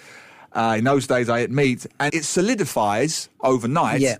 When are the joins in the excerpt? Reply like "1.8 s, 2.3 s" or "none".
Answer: 2.1 s